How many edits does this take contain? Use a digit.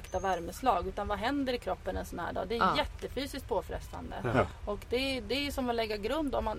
0